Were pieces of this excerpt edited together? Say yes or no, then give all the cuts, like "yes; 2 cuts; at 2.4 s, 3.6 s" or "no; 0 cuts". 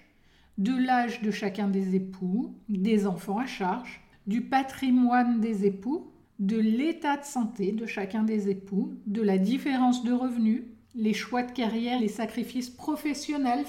yes; 5 cuts; at 2.6 s, 4.1 s, 6.2 s, 10.8 s, 12.0 s